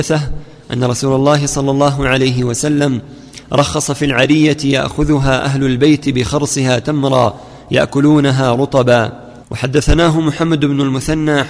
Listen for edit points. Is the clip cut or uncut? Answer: cut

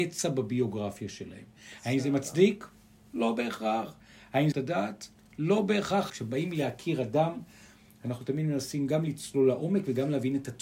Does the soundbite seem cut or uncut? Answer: cut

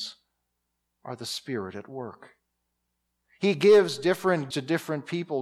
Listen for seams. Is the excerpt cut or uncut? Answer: cut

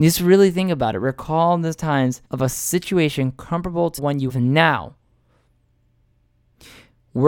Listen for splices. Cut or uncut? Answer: cut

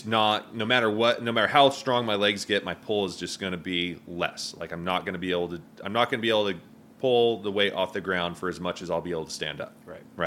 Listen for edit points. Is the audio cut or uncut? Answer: uncut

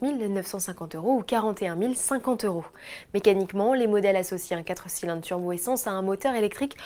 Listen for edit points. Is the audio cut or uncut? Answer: uncut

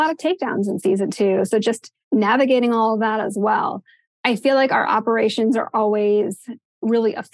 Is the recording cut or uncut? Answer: uncut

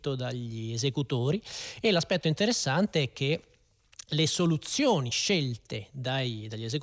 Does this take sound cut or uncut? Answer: uncut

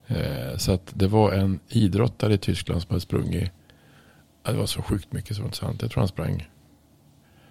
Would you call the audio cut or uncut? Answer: uncut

